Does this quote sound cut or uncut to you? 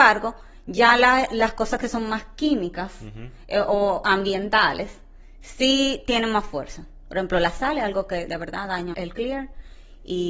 cut